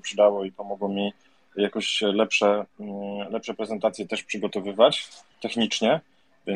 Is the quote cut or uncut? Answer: uncut